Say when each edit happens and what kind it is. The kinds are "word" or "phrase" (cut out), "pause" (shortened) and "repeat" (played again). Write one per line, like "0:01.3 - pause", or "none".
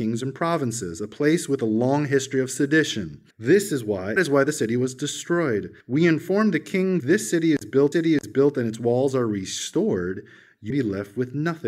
0:03.3 - pause
0:04.2 - word
0:05.8 - pause
0:07.0 - phrase
0:07.9 - repeat
0:10.7 - word